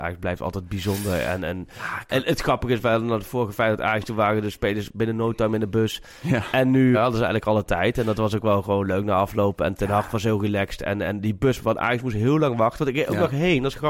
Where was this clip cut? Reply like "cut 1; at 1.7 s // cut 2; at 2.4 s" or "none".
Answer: cut 1; at 6.9 s